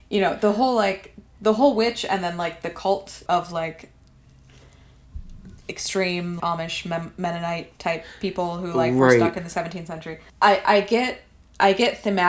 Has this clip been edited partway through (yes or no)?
yes